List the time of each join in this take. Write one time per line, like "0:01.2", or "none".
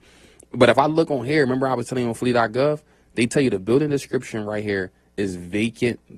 none